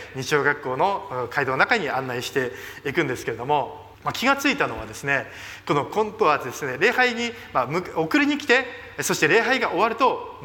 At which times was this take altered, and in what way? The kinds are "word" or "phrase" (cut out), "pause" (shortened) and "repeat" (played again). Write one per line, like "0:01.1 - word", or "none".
0:03.9 - pause